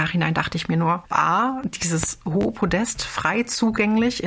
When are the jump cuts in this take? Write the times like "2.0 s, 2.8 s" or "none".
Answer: 1.1 s